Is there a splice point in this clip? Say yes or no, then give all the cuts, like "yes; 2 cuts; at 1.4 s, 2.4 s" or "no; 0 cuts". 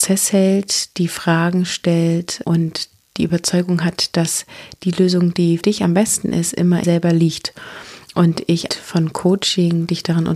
yes; 4 cuts; at 2.4 s, 5.6 s, 6.8 s, 8.7 s